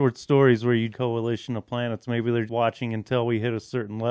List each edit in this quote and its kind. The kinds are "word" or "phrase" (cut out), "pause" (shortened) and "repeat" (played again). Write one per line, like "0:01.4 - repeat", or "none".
0:00.9 - phrase
0:02.5 - word